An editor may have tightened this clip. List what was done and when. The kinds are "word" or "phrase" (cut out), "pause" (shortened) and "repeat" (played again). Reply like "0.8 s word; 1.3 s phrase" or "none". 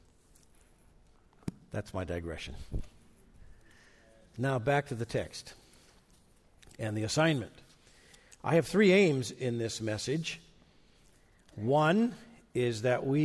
none